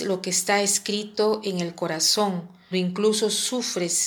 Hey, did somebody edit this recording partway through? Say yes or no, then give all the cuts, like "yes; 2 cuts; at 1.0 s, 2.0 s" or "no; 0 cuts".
yes; 1 cut; at 2.7 s